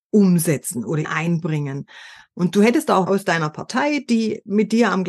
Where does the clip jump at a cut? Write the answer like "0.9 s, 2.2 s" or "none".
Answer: 1.0 s, 3.1 s